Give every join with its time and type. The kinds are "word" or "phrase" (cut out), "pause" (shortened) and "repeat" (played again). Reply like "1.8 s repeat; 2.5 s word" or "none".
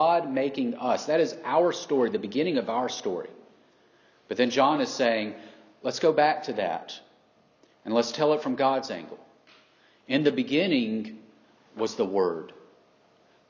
none

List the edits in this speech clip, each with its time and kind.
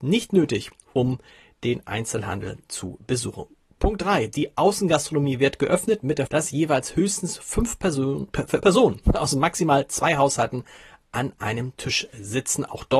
6.3 s word; 8.6 s word

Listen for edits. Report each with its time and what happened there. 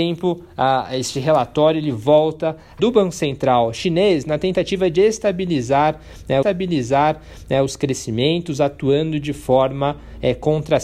2.8 s phrase; 6.4 s repeat

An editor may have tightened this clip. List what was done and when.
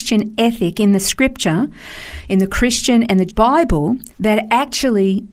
3.3 s word; 4.1 s pause

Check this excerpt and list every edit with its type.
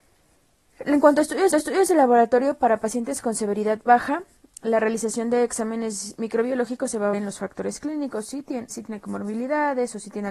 1.5 s repeat; 7.1 s word; 8.7 s word

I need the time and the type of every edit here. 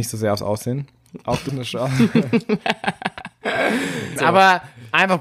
1.5 s word; 4.2 s word

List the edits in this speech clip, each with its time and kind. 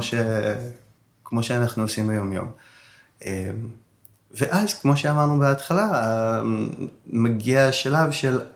none

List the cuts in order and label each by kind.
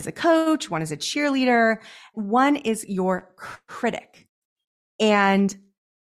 2.1 s word

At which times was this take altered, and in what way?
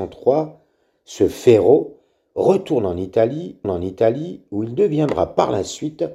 3.6 s repeat

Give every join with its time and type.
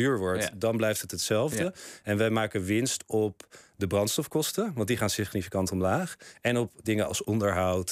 none

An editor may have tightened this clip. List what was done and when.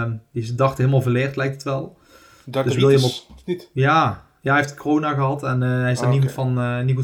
none

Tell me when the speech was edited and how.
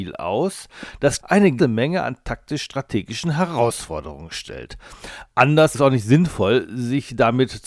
1.2 s word; 1.6 s word; 5.7 s word

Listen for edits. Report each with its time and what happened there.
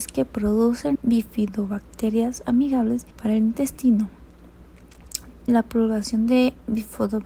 1.0 s word; 3.1 s pause; 5.5 s word

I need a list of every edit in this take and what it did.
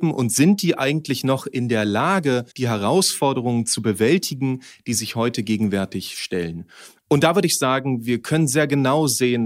2.5 s pause

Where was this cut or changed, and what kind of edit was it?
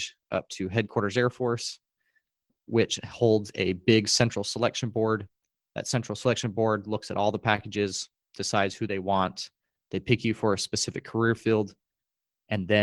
none

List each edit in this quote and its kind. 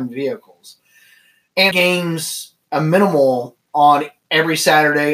1.7 s phrase

